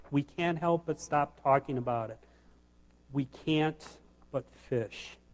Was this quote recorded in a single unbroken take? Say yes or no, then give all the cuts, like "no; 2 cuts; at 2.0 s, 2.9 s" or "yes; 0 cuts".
yes; 0 cuts